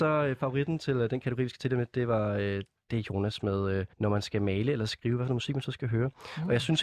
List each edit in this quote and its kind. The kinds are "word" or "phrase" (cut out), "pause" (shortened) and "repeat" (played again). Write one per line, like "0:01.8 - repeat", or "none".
0:03.9 - pause